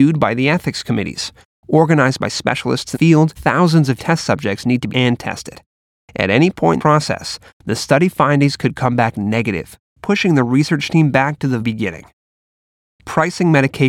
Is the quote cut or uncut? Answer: cut